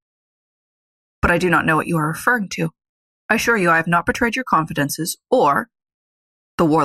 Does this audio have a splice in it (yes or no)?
no